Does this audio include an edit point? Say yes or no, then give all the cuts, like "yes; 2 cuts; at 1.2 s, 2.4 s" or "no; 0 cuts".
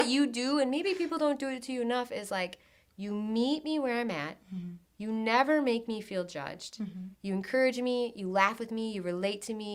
yes; 2 cuts; at 4.8 s, 7.1 s